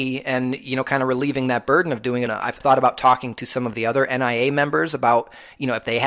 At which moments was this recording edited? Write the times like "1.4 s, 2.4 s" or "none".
2.3 s, 2.6 s